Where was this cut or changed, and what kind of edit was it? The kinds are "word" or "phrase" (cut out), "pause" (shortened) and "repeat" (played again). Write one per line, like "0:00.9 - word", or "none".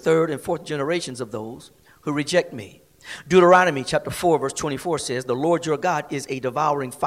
none